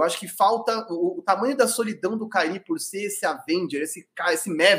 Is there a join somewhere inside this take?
no; 0 cuts

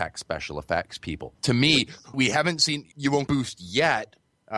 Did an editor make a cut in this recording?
yes; 4 cuts; at 1.4 s, 2.1 s, 2.9 s, 3.3 s

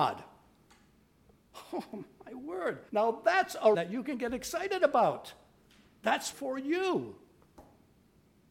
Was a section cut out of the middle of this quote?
yes; 3 cuts; at 2.9 s, 3.7 s, 6.3 s

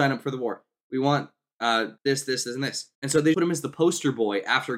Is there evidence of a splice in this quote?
yes; 4 cuts; at 2.0 s, 2.4 s, 2.9 s, 3.3 s

